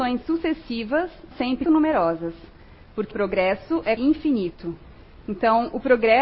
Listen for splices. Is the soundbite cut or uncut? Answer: cut